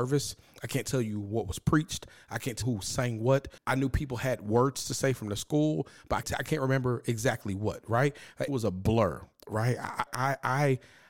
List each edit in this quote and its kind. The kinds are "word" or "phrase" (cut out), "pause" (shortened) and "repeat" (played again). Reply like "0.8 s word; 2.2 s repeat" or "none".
2.6 s word; 3.6 s pause; 6.2 s word; 8.5 s word; 10.1 s word